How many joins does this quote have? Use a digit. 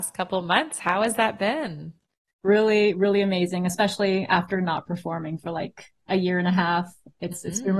0